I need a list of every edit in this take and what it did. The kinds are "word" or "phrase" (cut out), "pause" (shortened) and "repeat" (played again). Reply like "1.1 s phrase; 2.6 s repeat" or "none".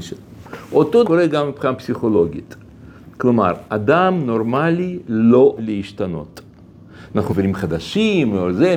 1.0 s word; 5.6 s word; 7.3 s word